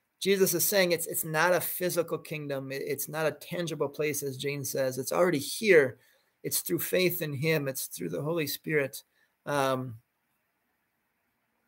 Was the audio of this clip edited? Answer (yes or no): no